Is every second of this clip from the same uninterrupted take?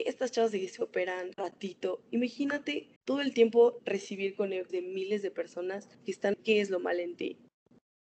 no; 5 cuts; at 1.3 s, 3.0 s, 4.7 s, 5.9 s, 6.3 s

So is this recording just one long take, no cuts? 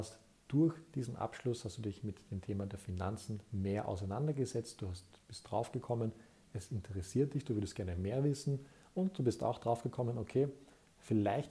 yes; 0 cuts

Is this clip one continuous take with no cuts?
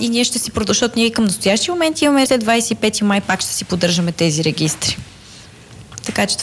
no; 1 cut; at 2.3 s

